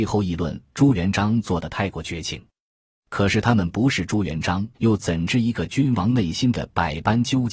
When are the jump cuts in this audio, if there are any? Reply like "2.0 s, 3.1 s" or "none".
4.7 s